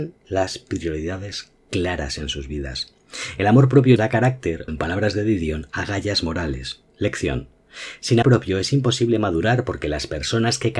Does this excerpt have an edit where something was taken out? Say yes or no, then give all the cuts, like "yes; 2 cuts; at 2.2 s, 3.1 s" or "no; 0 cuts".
yes; 3 cuts; at 4.0 s, 4.7 s, 8.2 s